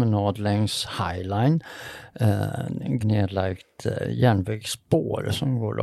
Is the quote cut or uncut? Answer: cut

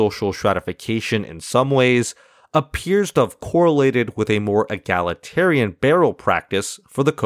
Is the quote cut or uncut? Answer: uncut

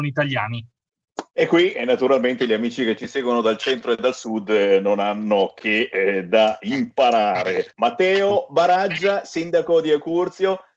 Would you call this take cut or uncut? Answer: cut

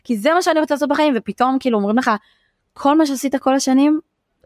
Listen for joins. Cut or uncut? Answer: uncut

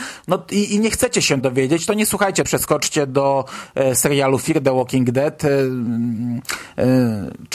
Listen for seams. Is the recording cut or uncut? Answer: cut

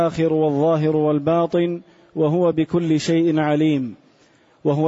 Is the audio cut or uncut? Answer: uncut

